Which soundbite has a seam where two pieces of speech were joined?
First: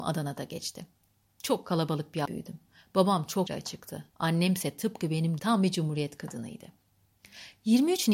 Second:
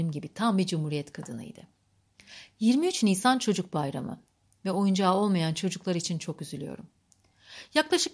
first; 4 cuts; at 2.3 s, 3.5 s, 4.1 s, 5.4 s

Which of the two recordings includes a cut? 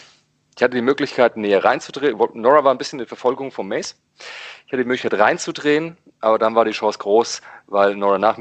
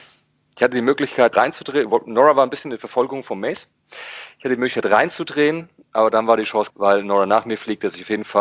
second; 2 cuts; at 1.3 s, 6.7 s

